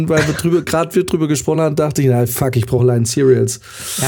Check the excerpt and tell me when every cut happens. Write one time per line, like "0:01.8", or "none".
none